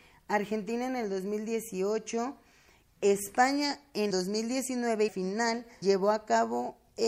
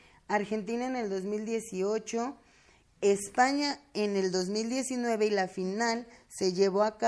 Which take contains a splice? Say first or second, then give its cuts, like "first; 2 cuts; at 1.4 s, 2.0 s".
first; 3 cuts; at 4.1 s, 5.1 s, 5.8 s